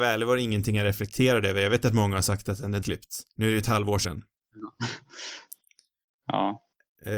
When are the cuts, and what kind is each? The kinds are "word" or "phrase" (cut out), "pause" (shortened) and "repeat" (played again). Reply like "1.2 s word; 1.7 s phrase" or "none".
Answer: 2.8 s word; 3.3 s pause; 4.0 s phrase